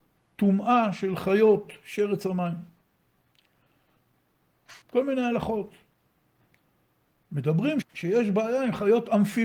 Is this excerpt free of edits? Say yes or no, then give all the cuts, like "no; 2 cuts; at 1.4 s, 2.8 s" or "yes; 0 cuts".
no; 2 cuts; at 4.8 s, 7.8 s